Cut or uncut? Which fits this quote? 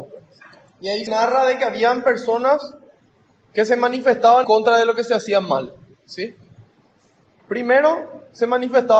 cut